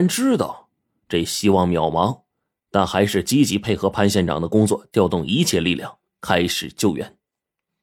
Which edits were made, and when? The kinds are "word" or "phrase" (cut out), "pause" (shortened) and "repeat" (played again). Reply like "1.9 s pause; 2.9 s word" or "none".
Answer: none